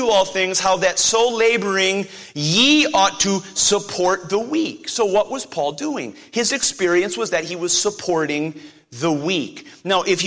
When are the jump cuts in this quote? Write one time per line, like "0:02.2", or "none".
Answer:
none